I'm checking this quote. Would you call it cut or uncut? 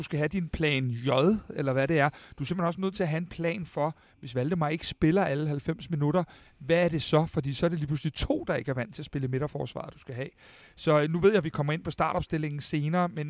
uncut